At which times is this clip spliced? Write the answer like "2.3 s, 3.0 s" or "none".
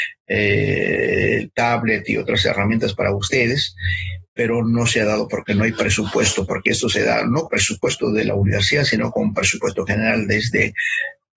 7.4 s